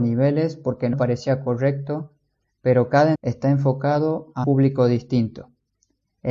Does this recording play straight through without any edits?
no; 3 cuts; at 0.9 s, 3.1 s, 4.4 s

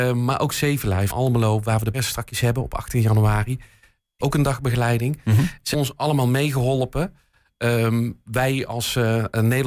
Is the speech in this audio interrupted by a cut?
yes; 4 cuts; at 1.1 s, 1.9 s, 4.2 s, 5.7 s

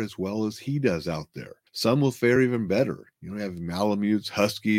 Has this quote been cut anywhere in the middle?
no; 0 cuts

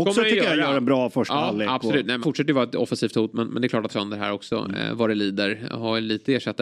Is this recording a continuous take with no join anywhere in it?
no; 2 cuts; at 2.2 s, 3.9 s

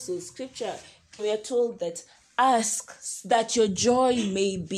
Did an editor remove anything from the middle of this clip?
yes; 1 cut; at 1.2 s

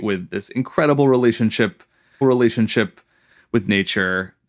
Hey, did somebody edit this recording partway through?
yes; 1 cut; at 2.2 s

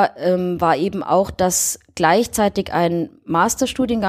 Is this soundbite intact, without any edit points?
yes; 0 cuts

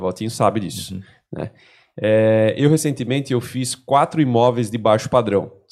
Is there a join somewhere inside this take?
no; 0 cuts

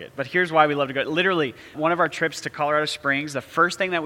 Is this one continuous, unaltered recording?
no; 1 cut; at 1.7 s

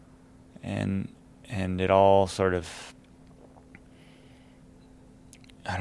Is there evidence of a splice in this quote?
no; 0 cuts

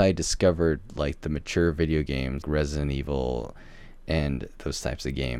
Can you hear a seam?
yes; 1 cut; at 2.4 s

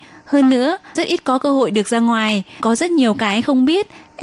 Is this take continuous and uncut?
no; 2 cuts; at 1.0 s, 2.6 s

